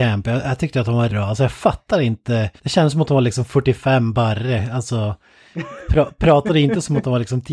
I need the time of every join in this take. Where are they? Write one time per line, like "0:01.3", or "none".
0:01.1
0:02.6